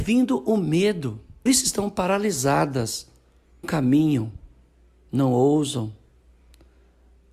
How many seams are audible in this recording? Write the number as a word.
two